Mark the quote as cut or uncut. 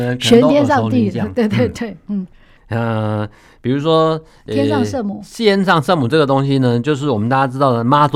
uncut